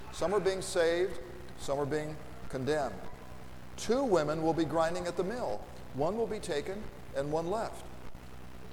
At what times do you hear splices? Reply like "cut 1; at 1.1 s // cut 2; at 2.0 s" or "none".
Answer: none